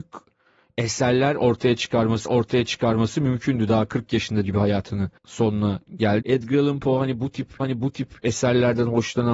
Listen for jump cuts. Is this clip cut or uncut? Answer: cut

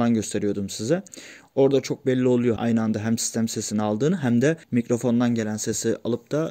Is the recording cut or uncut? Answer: cut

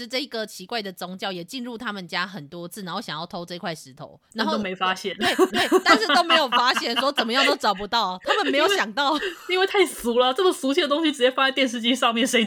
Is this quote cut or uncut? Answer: cut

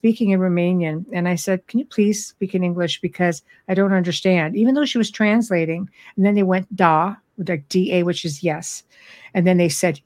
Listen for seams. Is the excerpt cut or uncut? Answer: uncut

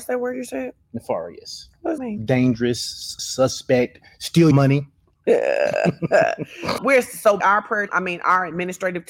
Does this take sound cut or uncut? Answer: cut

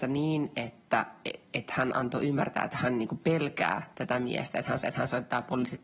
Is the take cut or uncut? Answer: cut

